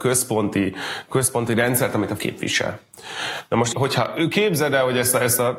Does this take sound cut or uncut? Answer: cut